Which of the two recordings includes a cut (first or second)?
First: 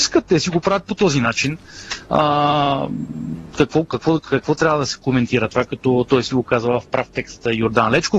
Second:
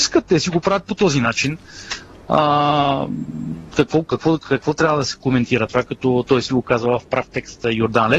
first